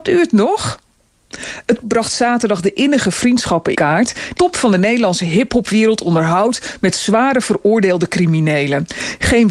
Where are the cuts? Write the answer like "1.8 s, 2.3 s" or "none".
1.8 s, 3.7 s, 4.4 s